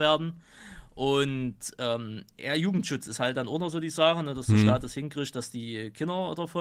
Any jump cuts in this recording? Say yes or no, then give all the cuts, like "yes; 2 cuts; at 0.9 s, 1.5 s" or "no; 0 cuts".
no; 0 cuts